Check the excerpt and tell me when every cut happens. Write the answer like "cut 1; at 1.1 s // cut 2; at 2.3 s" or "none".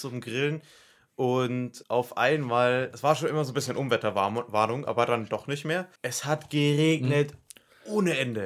cut 1; at 1.8 s // cut 2; at 6.0 s